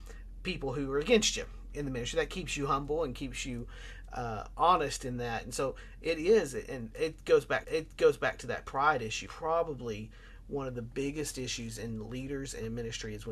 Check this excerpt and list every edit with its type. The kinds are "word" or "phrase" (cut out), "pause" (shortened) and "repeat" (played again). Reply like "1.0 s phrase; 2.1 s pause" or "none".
7.6 s repeat; 9.3 s phrase